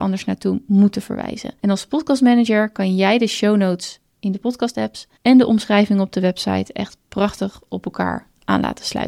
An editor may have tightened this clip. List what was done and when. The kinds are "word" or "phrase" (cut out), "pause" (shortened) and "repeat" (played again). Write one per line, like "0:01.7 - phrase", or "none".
0:01.6 - pause
0:05.2 - pause